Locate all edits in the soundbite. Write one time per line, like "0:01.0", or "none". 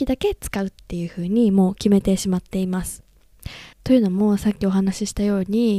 0:03.7